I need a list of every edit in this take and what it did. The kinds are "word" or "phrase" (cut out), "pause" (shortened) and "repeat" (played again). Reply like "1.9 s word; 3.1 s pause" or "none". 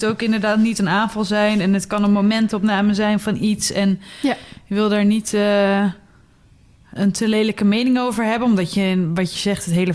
7.0 s word